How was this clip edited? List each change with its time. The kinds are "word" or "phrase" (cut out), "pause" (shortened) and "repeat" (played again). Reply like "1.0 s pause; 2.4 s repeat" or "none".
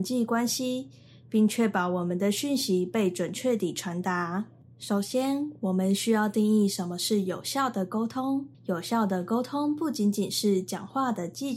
8.5 s pause